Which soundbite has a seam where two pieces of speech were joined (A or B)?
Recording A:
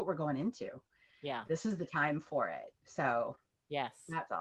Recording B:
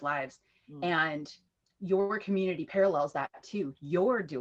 A